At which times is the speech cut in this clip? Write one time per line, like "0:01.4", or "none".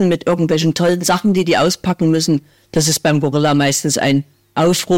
none

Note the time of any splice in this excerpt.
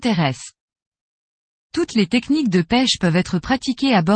none

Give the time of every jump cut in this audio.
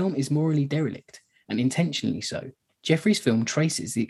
none

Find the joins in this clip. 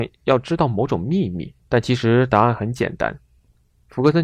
0:01.6

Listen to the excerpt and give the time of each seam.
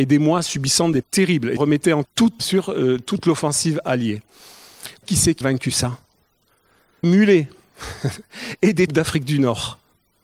0:01.0
0:01.6
0:02.0
0:02.4
0:05.0
0:05.4
0:07.0
0:08.9

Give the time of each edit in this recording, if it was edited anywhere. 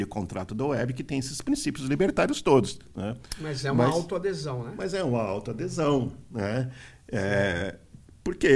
none

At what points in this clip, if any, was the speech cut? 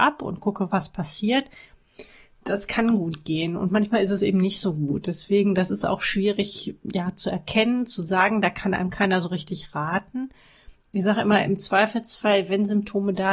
none

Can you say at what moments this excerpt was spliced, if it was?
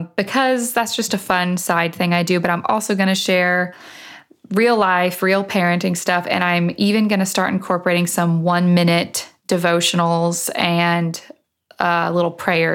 none

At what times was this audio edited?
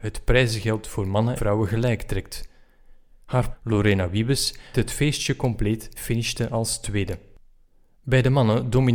0:01.4
0:03.5
0:04.7
0:06.0

